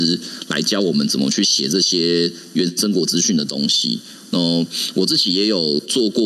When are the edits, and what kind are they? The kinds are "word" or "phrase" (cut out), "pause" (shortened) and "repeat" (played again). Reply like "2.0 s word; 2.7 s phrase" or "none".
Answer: none